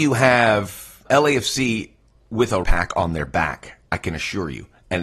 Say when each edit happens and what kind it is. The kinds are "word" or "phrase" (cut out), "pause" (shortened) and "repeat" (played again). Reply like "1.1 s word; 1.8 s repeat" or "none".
1.1 s word; 2.6 s word; 3.9 s pause